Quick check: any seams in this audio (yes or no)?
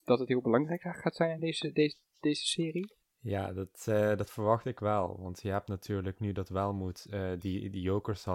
no